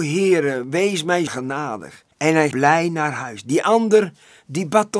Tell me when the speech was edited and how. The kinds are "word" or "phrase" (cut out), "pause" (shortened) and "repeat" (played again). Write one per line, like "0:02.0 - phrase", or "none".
0:01.3 - word
0:02.1 - pause
0:02.5 - word